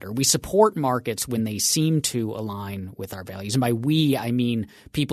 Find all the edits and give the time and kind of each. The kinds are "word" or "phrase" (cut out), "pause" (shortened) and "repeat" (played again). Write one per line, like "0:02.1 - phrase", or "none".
none